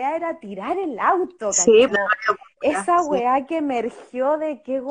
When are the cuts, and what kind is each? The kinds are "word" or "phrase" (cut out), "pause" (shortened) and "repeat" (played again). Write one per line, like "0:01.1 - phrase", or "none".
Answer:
0:01.9 - word